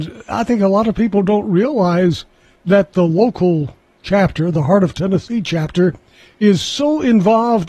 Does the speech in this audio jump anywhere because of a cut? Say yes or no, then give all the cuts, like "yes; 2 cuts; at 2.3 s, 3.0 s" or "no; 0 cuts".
no; 0 cuts